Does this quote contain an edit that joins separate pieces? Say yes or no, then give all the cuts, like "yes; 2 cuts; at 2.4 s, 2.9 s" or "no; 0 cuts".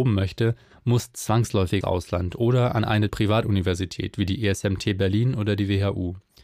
yes; 2 cuts; at 1.8 s, 3.1 s